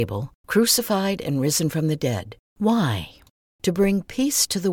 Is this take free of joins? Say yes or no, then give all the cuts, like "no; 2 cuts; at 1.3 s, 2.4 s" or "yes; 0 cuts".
no; 1 cut; at 2.5 s